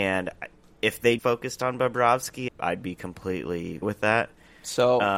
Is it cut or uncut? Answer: cut